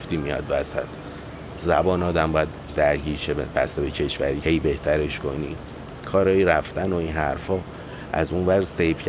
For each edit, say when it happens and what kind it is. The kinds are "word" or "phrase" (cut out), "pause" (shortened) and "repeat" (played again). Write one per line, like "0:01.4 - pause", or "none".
0:04.4 - phrase